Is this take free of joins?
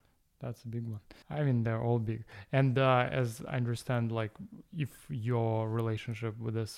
no; 1 cut; at 1.2 s

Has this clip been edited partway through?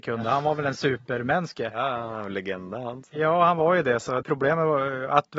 yes; 1 cut; at 4.2 s

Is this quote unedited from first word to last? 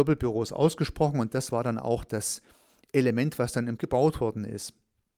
no; 1 cut; at 3.8 s

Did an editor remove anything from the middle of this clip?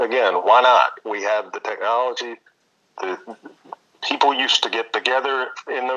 no; 0 cuts

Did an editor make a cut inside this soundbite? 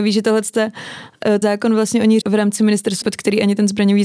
yes; 3 cuts; at 1.4 s, 2.2 s, 3.0 s

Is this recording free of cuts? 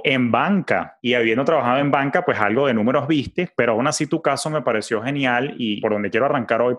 yes; 0 cuts

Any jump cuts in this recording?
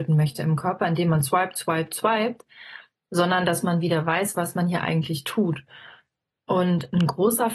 no; 0 cuts

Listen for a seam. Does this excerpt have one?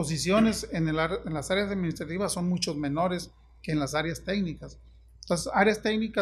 no; 0 cuts

